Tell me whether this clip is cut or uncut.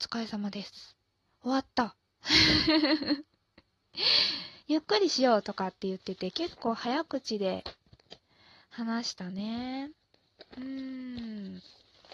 uncut